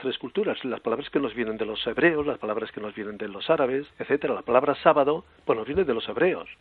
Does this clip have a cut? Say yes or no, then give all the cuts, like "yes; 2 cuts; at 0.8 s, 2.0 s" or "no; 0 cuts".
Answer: yes; 1 cut; at 3.9 s